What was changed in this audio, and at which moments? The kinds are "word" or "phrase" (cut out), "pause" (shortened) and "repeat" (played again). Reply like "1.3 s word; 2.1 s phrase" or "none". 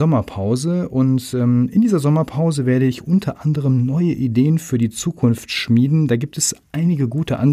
none